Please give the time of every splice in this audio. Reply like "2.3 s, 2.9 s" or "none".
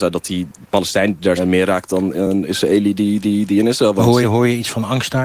1.4 s, 3.2 s, 4.2 s